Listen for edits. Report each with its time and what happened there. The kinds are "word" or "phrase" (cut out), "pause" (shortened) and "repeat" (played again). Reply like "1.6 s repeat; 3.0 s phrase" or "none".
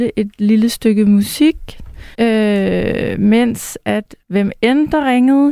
2.1 s pause; 4.2 s pause